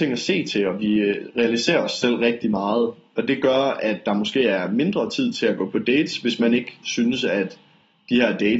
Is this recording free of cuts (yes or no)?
yes